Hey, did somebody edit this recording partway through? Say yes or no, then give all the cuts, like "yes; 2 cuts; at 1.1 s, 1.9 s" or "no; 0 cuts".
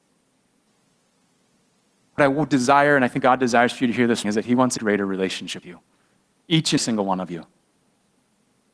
yes; 6 cuts; at 2.2 s, 3.2 s, 4.2 s, 4.8 s, 5.6 s, 6.8 s